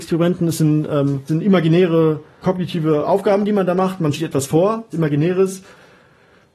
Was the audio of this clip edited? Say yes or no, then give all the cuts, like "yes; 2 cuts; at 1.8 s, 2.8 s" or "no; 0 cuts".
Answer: yes; 4 cuts; at 1.3 s, 2.4 s, 4.1 s, 4.9 s